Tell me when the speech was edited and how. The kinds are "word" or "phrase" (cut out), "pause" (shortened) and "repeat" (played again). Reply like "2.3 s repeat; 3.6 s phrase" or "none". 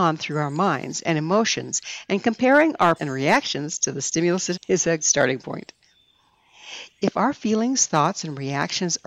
3.0 s word; 4.5 s word; 5.0 s word